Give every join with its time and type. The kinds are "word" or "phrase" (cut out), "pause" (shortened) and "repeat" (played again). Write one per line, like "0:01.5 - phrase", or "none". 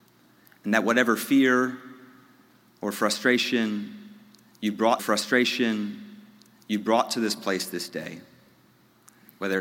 0:05.0 - repeat